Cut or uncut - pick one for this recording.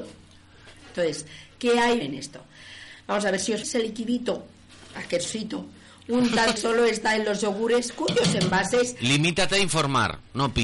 cut